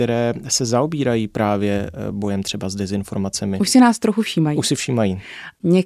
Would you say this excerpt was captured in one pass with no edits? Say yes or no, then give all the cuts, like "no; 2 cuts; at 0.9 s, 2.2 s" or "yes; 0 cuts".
yes; 0 cuts